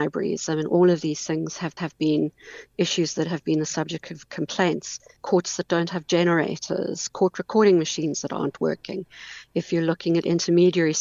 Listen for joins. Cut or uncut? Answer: cut